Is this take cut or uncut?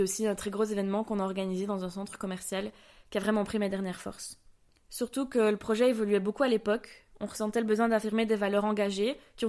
uncut